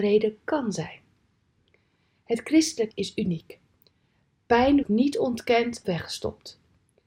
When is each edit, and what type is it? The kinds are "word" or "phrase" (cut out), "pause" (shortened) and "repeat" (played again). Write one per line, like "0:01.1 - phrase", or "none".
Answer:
0:02.9 - word
0:04.8 - word
0:05.8 - word